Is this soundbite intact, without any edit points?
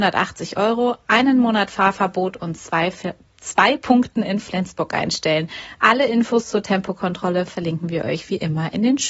yes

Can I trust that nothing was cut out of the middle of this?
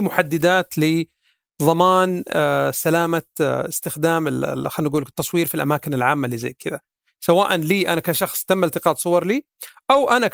yes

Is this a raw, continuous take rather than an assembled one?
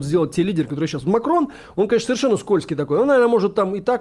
yes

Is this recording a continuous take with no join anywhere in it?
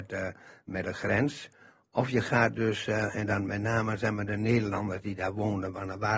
yes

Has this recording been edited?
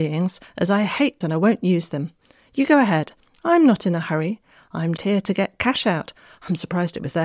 yes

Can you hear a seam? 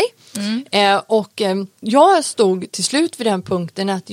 yes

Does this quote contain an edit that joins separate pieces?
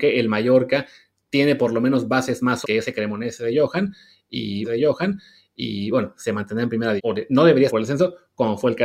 yes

